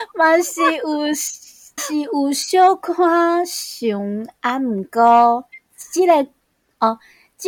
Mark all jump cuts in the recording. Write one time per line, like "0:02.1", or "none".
0:01.8
0:05.7